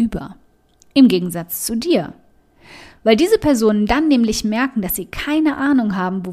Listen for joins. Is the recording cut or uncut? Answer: uncut